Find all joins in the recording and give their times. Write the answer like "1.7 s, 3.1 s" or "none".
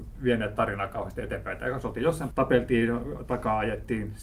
2.3 s